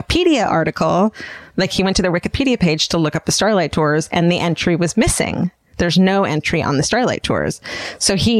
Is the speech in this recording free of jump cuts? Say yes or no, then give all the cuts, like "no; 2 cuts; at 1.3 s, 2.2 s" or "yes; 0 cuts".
yes; 0 cuts